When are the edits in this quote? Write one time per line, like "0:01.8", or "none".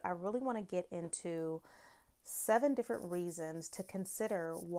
none